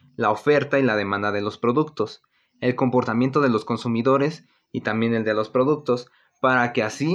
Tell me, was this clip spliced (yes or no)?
no